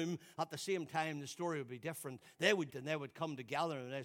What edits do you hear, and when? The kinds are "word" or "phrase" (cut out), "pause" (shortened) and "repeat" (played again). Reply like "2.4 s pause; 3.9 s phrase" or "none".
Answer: 2.7 s word